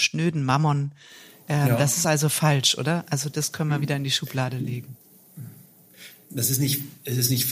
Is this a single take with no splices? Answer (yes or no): yes